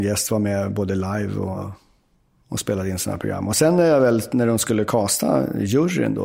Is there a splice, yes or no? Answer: no